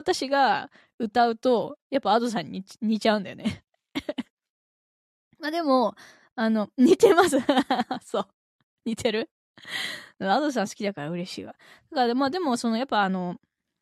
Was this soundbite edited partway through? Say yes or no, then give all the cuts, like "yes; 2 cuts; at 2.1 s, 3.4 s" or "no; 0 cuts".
no; 0 cuts